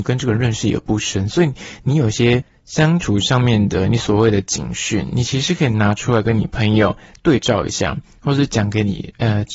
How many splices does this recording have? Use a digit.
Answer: 0